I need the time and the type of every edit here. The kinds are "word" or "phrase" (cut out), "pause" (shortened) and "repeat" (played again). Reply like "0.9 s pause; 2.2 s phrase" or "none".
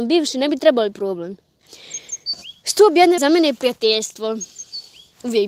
0.9 s word; 3.2 s word